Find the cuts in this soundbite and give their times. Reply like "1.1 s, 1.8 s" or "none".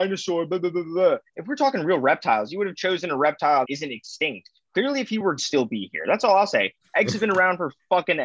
1.3 s, 3.6 s, 5.4 s